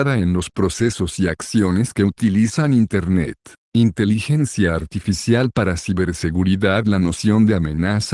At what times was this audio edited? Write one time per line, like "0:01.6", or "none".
0:03.6